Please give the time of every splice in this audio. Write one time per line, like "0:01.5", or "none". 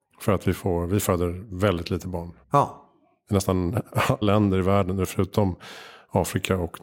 0:02.4
0:04.2